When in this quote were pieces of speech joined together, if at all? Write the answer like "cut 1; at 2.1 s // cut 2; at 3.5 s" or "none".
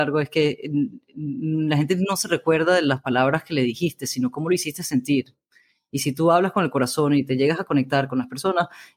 none